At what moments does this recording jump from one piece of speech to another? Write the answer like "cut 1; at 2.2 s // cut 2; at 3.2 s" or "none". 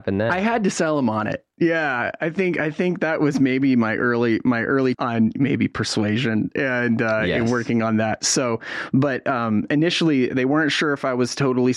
cut 1; at 4.9 s